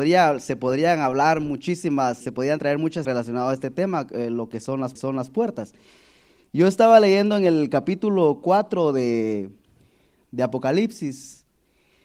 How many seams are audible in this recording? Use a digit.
3